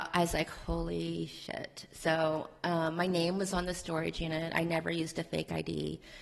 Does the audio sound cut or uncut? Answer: uncut